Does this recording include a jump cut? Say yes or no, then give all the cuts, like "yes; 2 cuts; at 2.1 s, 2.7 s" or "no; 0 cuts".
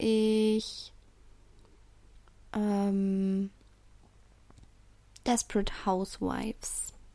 no; 0 cuts